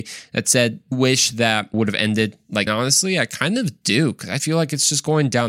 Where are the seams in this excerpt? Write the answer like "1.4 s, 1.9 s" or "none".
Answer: 0.9 s, 1.7 s, 2.7 s, 4.4 s

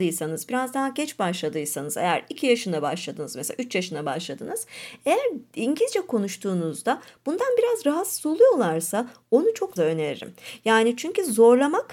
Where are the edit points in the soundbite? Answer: 9.8 s

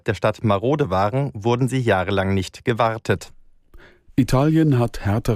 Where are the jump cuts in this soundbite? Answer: none

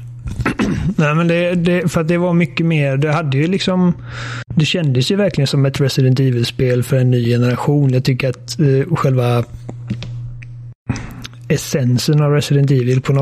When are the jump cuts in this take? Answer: 4.5 s

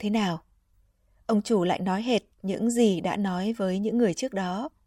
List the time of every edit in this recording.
2.3 s

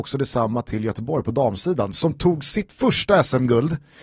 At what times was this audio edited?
none

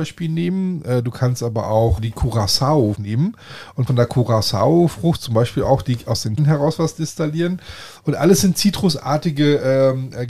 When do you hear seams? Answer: 2.0 s, 2.9 s, 3.9 s, 6.4 s

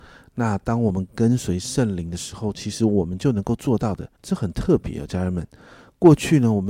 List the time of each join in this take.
4.1 s

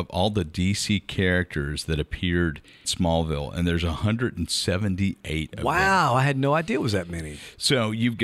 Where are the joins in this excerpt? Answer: 2.8 s

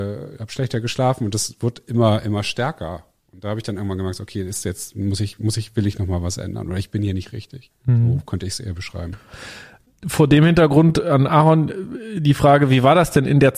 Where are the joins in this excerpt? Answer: none

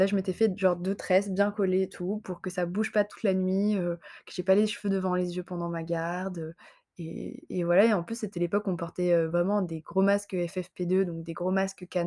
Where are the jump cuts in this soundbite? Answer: none

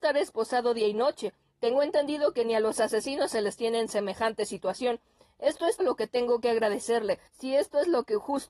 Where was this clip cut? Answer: 5.8 s, 7.3 s

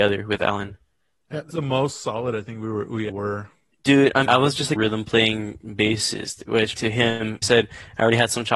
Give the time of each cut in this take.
1.5 s, 3.1 s, 4.3 s, 4.8 s, 6.7 s, 7.4 s

